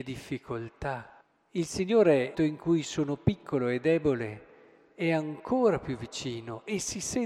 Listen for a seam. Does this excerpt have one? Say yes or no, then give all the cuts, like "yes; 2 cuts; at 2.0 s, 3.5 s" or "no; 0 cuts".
yes; 2 cuts; at 1.2 s, 2.3 s